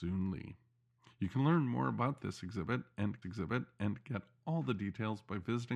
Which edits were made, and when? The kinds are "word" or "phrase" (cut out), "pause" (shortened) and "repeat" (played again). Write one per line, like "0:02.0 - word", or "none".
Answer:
0:03.2 - repeat